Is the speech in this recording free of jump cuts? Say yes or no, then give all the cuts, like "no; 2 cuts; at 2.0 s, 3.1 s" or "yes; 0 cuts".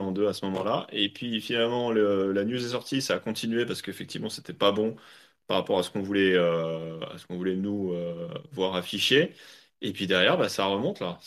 yes; 0 cuts